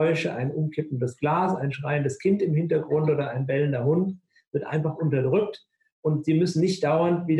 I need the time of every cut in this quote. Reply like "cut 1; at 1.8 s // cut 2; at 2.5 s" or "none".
none